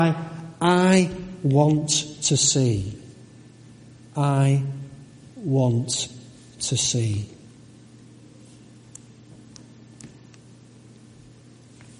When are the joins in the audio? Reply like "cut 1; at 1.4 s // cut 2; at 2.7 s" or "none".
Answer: none